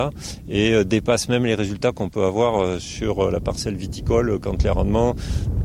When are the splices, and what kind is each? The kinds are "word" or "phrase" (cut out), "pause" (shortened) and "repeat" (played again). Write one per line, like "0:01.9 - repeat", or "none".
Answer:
none